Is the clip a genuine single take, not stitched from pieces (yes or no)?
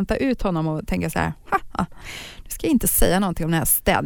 yes